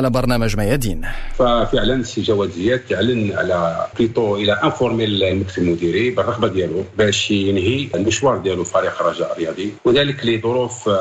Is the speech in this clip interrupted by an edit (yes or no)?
no